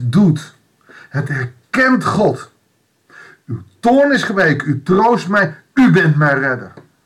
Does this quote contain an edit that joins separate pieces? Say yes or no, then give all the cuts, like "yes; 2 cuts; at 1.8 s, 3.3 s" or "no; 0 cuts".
no; 0 cuts